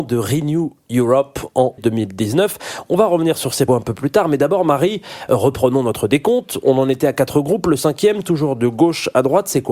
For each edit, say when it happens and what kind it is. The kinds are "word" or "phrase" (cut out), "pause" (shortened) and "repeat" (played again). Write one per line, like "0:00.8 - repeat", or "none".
0:01.8 - word
0:03.7 - word